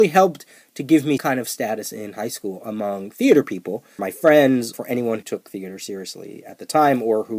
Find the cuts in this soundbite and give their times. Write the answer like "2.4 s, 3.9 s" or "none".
1.2 s, 4.0 s, 4.7 s, 5.2 s